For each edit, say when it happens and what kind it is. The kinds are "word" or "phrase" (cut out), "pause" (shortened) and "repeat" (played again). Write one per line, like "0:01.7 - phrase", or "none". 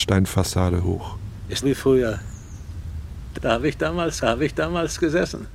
0:01.6 - phrase
0:03.4 - word
0:04.2 - repeat